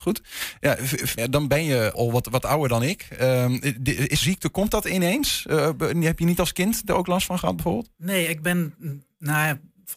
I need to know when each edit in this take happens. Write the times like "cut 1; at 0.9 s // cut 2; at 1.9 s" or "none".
cut 1; at 1.2 s // cut 2; at 1.9 s // cut 3; at 4.2 s